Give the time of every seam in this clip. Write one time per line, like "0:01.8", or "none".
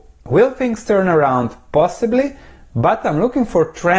none